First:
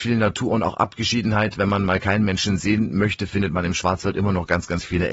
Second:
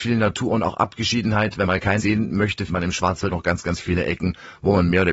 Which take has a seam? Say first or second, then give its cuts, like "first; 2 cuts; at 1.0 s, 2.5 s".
second; 4 cuts; at 1.6 s, 2.0 s, 2.7 s, 3.3 s